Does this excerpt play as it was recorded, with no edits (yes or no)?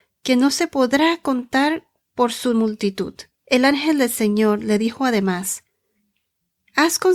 no